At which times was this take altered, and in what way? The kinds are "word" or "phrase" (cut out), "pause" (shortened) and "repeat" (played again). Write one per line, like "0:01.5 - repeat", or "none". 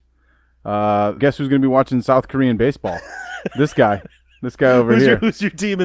0:01.2 - phrase